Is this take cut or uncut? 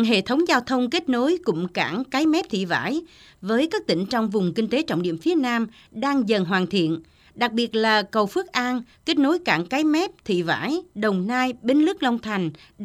uncut